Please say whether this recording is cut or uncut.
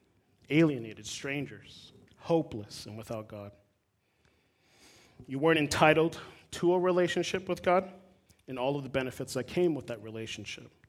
cut